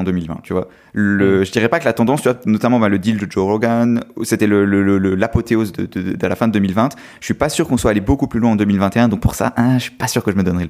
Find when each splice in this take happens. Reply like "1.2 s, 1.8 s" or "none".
none